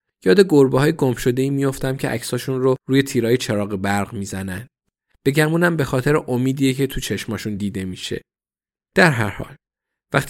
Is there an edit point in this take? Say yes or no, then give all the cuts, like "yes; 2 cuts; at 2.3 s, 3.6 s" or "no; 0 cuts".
no; 0 cuts